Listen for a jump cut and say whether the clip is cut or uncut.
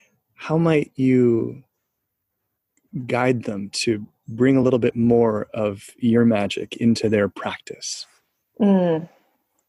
uncut